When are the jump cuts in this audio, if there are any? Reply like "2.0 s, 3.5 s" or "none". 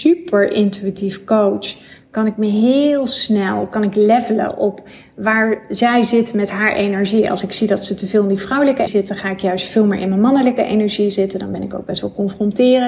8.9 s